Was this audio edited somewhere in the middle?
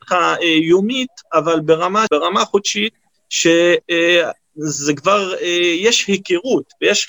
yes; 1 cut; at 2.1 s

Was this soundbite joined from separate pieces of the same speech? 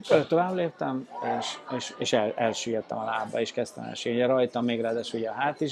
no; 0 cuts

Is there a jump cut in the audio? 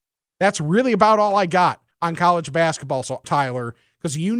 yes; 2 cuts; at 1.9 s, 3.2 s

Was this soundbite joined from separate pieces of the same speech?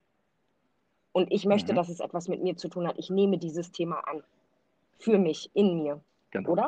no; 0 cuts

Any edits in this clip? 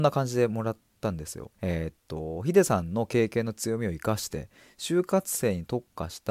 yes; 1 cut; at 1.5 s

